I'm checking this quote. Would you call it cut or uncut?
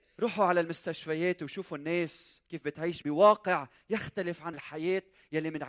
cut